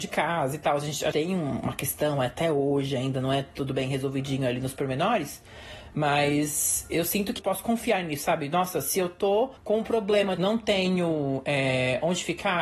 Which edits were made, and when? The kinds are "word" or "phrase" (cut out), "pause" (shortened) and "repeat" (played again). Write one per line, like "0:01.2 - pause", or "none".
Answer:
0:01.1 - word
0:07.4 - word
0:09.6 - pause
0:10.4 - word

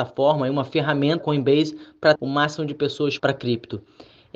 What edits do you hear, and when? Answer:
0:01.2 - word
0:02.1 - word
0:03.2 - word

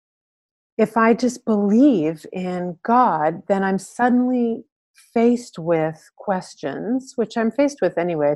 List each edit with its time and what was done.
none

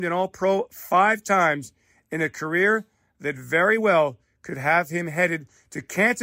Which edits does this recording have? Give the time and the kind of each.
none

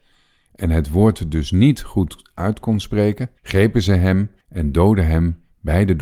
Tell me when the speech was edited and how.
0:03.4 - pause
0:04.4 - pause

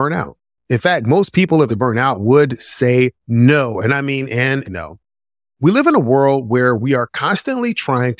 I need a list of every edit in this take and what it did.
0:01.7 - phrase
0:03.2 - pause
0:04.6 - word

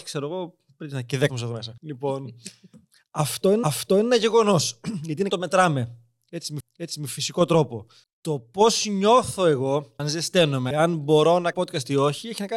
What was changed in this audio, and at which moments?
0:01.3 - word
0:01.8 - pause
0:03.6 - repeat
0:05.3 - phrase
0:06.6 - repeat
0:08.0 - pause
0:10.0 - phrase
0:10.7 - phrase
0:11.5 - word

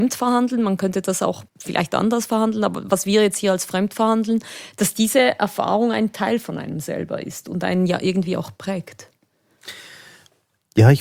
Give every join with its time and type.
0:01.5 - pause

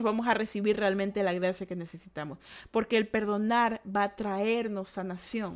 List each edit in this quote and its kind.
none

